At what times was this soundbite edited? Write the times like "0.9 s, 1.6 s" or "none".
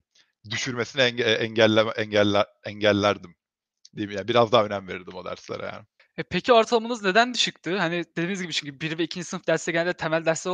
6.0 s